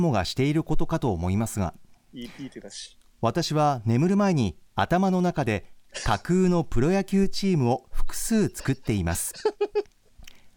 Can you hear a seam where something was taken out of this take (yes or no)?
yes